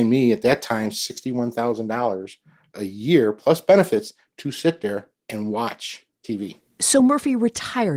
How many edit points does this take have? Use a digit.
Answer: 0